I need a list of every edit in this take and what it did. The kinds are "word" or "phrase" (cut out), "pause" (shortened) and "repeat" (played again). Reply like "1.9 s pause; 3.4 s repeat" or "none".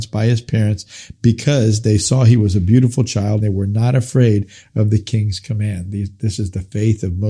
3.4 s word